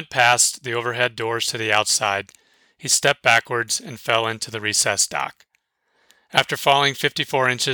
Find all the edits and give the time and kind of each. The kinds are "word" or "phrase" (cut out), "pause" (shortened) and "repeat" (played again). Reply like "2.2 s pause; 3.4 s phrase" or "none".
none